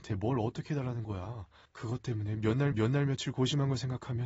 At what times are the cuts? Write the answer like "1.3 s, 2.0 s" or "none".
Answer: 1.7 s, 2.7 s